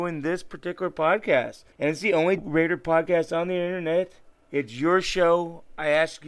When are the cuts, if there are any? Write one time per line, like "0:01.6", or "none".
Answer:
0:01.7
0:02.4
0:04.3